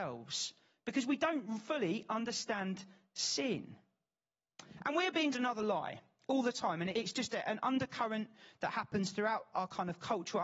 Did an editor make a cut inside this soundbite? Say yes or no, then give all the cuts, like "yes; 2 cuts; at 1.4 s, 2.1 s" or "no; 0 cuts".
yes; 3 cuts; at 5.3 s, 6.9 s, 9.5 s